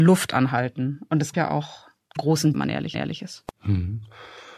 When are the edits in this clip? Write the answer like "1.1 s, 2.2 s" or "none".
1.3 s, 2.2 s, 2.5 s, 2.9 s